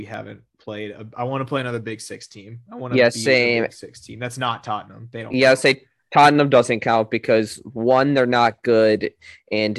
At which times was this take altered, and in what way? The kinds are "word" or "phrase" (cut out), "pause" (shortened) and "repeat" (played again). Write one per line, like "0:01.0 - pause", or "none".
none